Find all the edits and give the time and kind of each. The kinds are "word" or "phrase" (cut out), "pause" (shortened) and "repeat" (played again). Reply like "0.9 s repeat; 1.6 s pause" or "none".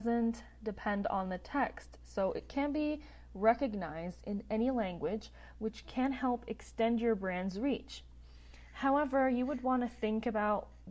none